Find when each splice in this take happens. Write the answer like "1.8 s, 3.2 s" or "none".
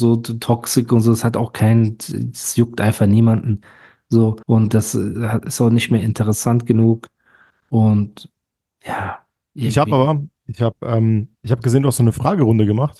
4.4 s, 11.3 s